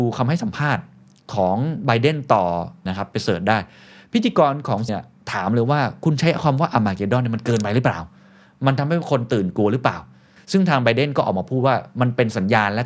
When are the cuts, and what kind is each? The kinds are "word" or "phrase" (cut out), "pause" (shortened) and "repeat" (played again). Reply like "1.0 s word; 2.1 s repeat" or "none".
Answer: 2.9 s word; 4.9 s word